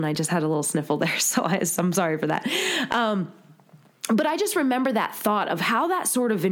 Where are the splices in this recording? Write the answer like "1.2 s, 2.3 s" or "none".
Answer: none